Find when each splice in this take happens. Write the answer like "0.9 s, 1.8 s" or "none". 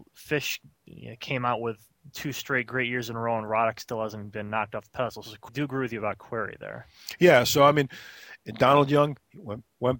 5.5 s